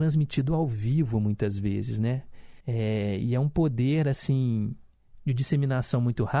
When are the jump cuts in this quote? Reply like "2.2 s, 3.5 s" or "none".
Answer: 2.6 s